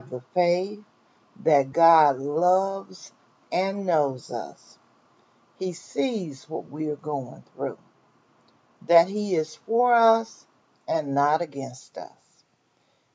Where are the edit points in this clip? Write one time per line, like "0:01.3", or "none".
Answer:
none